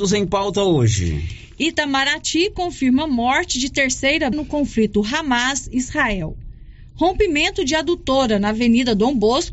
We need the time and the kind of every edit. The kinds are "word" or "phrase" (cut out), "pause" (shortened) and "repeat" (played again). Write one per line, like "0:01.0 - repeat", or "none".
0:04.3 - word